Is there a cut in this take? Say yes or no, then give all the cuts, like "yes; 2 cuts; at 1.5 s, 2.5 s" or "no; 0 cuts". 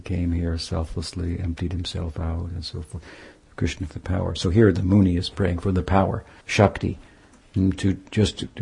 yes; 2 cuts; at 3.9 s, 6.4 s